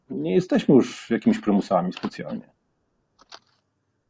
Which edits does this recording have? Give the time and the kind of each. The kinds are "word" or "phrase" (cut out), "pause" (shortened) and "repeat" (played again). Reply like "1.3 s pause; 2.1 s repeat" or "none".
none